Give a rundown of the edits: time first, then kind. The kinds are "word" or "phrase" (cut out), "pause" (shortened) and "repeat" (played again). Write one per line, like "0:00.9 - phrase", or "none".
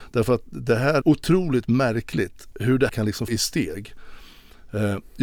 0:01.0 - word
0:02.5 - word
0:02.9 - word
0:03.3 - word